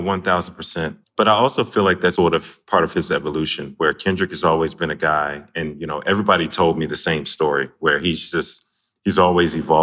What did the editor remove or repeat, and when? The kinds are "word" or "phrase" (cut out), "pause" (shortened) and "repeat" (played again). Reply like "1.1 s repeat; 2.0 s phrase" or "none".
2.2 s word